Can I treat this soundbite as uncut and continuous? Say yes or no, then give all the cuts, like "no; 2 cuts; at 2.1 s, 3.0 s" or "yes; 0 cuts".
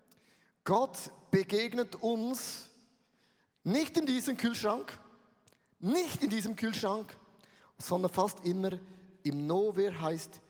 yes; 0 cuts